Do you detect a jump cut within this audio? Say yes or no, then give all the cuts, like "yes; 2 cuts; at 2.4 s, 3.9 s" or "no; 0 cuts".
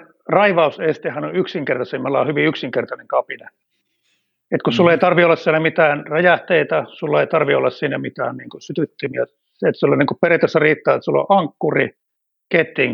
no; 0 cuts